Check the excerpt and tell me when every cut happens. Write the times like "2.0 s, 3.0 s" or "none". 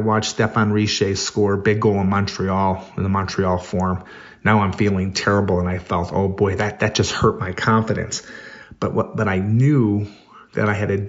none